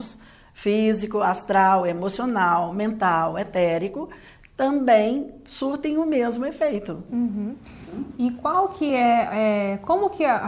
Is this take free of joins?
yes; 0 cuts

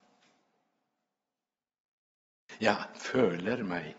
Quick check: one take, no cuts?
yes; 0 cuts

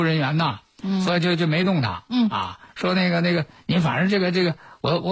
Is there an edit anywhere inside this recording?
yes; 1 cut; at 2.7 s

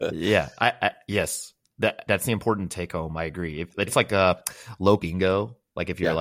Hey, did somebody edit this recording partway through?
yes; 3 cuts; at 2.1 s, 3.9 s, 5.0 s

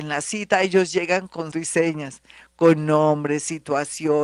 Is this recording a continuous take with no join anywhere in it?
no; 1 cut; at 1.5 s

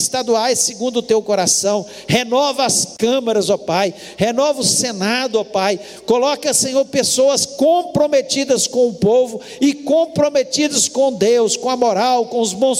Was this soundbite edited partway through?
no; 0 cuts

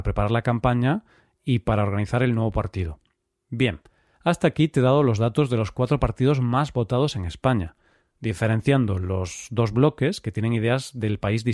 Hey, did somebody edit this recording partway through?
no; 0 cuts

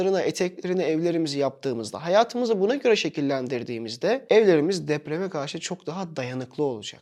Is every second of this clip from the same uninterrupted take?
yes; 0 cuts

